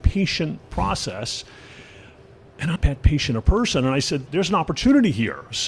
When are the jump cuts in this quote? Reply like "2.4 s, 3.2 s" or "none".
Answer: 2.8 s, 4.3 s